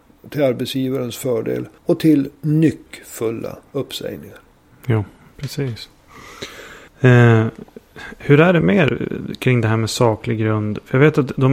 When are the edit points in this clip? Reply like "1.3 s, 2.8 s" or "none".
1.8 s, 3.7 s, 6.9 s